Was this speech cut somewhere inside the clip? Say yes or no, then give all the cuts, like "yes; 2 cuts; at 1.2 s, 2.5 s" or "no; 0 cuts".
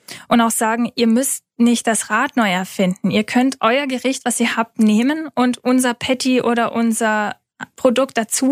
no; 0 cuts